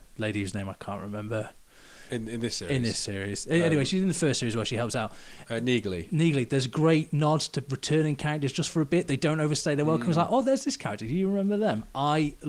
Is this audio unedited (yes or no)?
yes